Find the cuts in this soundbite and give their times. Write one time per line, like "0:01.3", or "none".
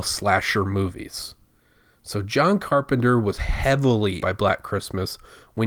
0:04.2